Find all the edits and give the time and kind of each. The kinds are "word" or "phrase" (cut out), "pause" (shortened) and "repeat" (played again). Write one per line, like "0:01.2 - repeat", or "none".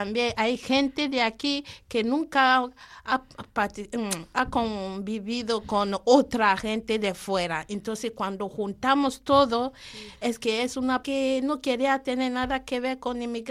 0:11.0 - phrase